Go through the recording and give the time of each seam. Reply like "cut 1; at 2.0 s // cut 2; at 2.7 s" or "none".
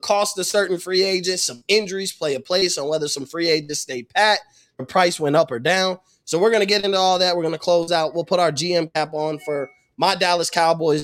none